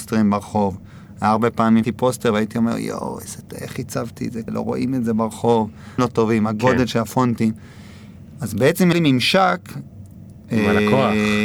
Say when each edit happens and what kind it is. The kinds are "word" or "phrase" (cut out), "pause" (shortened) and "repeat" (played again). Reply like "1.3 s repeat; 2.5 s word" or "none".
1.8 s word; 4.5 s word; 6.0 s word; 8.9 s word